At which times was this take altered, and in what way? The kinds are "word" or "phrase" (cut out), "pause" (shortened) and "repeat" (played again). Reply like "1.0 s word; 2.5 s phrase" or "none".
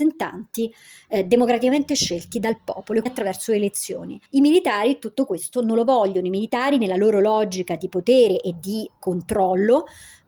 3.1 s word; 4.3 s pause